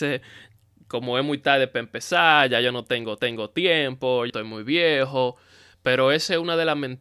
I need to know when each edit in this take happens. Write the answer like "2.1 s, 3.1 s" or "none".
3.2 s, 4.3 s